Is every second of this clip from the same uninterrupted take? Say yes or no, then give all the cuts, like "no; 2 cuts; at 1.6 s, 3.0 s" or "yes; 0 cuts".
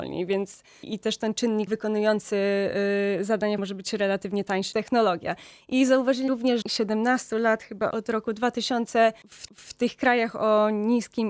no; 7 cuts; at 1.7 s, 3.6 s, 4.7 s, 6.3 s, 6.6 s, 7.9 s, 9.5 s